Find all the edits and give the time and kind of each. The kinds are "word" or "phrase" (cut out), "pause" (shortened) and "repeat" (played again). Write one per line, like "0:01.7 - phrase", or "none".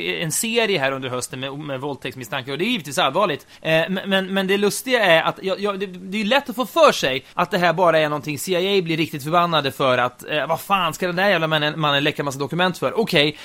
0:03.5 - pause
0:07.3 - pause